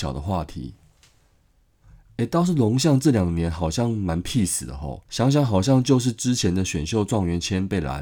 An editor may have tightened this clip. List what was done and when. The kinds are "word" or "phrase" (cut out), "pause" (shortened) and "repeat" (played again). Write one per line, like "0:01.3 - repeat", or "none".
0:05.1 - pause